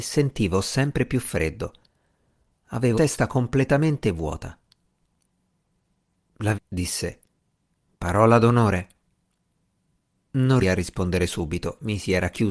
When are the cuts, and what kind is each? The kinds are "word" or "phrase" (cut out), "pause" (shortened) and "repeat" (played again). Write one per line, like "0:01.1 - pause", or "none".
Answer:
0:02.9 - word
0:06.5 - word
0:10.6 - word